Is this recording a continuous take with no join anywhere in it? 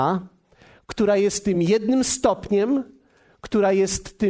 yes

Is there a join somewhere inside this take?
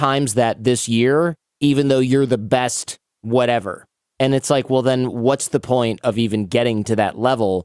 no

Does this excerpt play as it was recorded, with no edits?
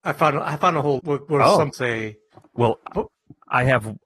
no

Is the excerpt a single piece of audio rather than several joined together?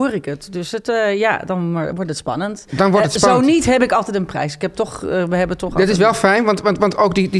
yes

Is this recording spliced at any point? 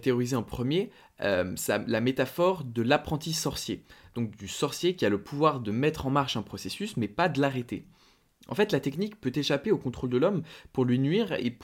no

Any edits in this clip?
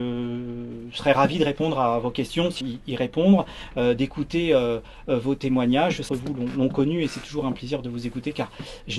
yes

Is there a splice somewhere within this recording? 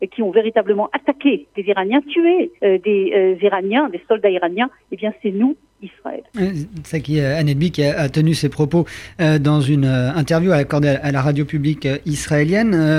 yes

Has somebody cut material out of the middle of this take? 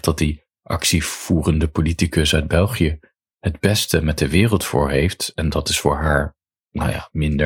no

